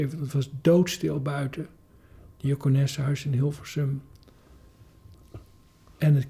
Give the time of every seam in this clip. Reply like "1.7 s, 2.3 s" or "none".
none